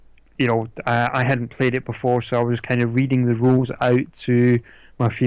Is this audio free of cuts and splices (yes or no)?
yes